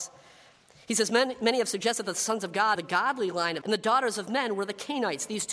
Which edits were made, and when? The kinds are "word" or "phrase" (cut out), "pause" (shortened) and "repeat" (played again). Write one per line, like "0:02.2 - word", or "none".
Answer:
0:02.8 - word
0:03.6 - word

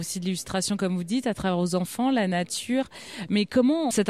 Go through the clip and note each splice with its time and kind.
none

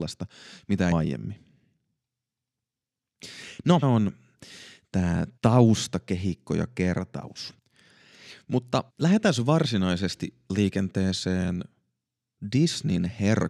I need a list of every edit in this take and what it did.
0:00.9 - phrase
0:03.8 - word
0:05.4 - pause
0:08.9 - pause

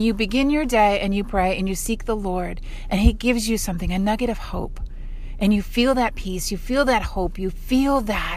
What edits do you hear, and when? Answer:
none

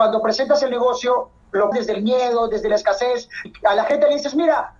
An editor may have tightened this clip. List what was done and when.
0:01.7 - word
0:03.5 - word

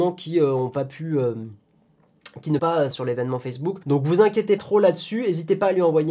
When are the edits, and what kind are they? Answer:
0:02.6 - word
0:02.9 - phrase
0:03.8 - pause
0:04.6 - word

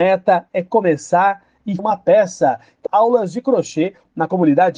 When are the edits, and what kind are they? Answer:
0:01.8 - word
0:02.9 - word

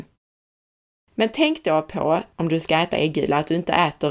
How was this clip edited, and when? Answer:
0:02.3 - pause

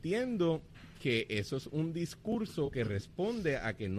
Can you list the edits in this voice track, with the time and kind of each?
none

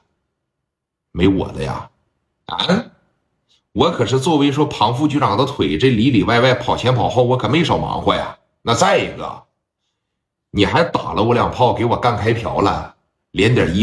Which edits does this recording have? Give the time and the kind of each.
none

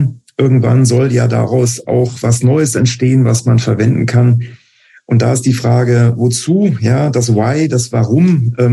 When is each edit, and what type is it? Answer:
none

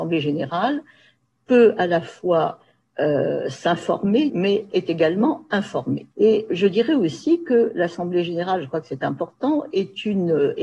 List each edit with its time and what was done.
0:04.3 - word
0:06.1 - pause

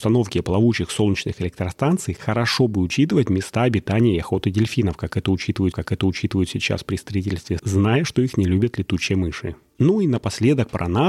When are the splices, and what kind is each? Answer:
0:05.7 - repeat
0:07.6 - word

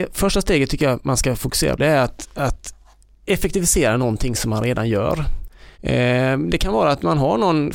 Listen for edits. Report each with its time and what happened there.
0:01.8 - word
0:05.7 - pause

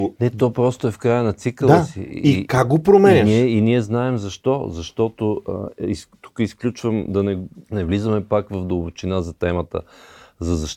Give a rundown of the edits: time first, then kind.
0:07.6 - pause

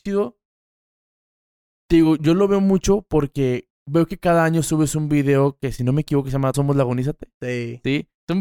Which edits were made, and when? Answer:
0:06.5 - word

